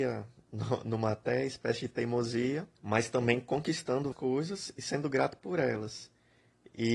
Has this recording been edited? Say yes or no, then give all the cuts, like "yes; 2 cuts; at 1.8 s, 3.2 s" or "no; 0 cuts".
yes; 2 cuts; at 2.7 s, 4.1 s